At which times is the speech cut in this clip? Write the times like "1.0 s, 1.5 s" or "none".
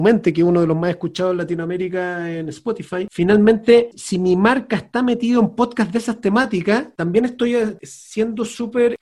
3.9 s